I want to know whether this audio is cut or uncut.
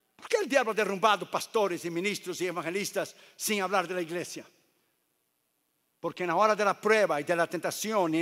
uncut